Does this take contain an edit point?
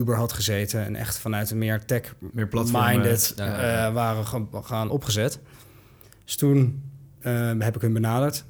yes; 1 cut; at 4.9 s

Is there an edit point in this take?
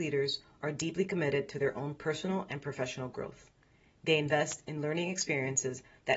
no; 0 cuts

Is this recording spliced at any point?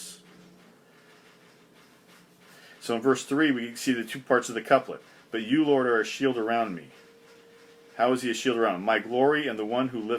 no; 0 cuts

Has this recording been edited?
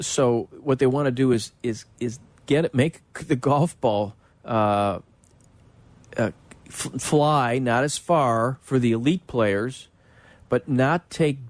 no; 0 cuts

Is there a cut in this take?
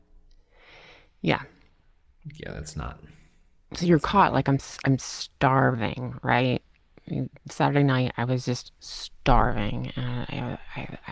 no; 0 cuts

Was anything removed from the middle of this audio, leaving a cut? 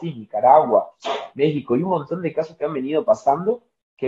no; 0 cuts

